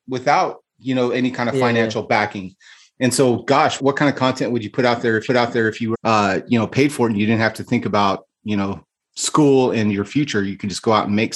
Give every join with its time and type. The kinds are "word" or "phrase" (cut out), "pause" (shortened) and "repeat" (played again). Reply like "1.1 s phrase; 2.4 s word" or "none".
3.8 s word; 5.3 s repeat; 5.9 s word